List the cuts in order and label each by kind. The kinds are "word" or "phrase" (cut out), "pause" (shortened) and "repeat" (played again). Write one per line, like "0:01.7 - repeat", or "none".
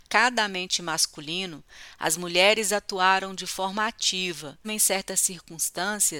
0:04.6 - word